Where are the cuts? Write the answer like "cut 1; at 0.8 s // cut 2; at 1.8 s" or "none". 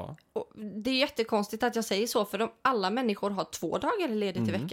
none